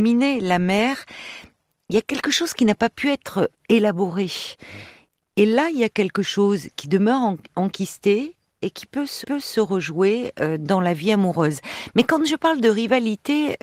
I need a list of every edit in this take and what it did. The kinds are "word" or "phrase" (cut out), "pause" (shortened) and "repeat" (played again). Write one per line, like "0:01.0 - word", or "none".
0:09.2 - repeat